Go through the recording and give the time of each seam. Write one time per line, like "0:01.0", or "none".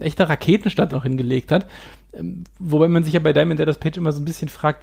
0:00.9